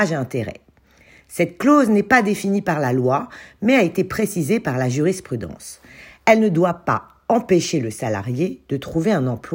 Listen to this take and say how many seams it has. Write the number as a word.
zero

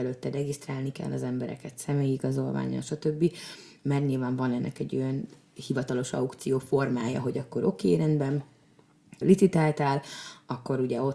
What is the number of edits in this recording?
one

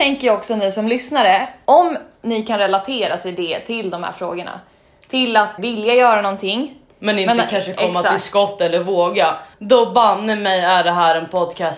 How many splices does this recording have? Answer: two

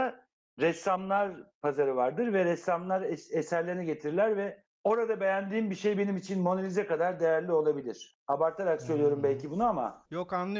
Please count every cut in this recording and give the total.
zero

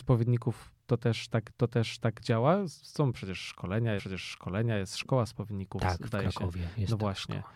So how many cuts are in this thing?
two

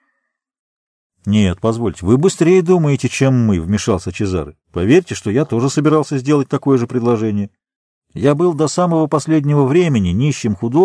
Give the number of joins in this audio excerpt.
one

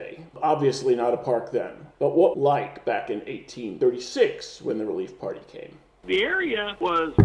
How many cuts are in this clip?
one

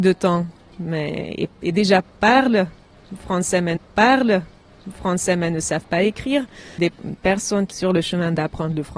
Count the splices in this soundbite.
three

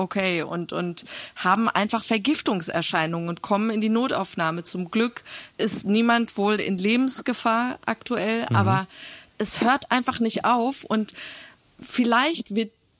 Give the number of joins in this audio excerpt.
one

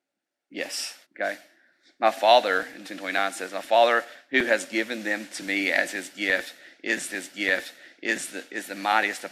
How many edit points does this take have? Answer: three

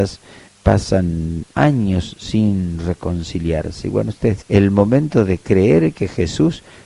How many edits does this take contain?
one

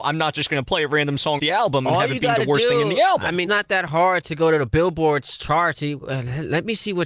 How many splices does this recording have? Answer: three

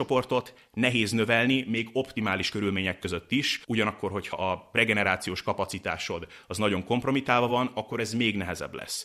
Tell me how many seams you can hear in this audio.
zero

